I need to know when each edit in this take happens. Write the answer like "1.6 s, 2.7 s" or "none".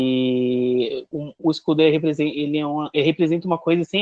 1.3 s